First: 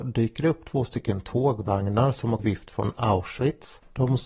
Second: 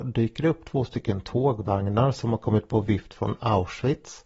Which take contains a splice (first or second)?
first